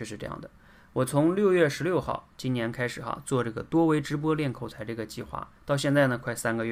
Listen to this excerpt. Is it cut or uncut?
cut